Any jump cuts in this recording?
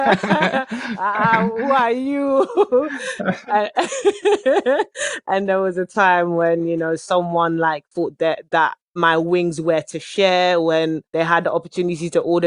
yes; 1 cut; at 11.1 s

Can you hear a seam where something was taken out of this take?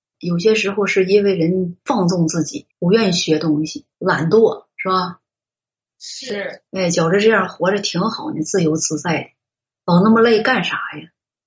yes; 3 cuts; at 2.7 s, 3.9 s, 6.7 s

